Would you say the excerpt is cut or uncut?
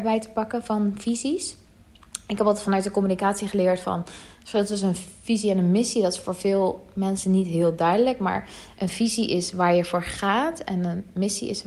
uncut